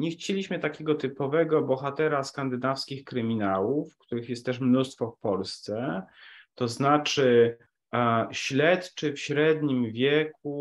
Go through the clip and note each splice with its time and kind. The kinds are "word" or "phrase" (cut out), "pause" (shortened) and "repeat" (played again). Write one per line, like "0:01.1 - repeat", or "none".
0:07.7 - pause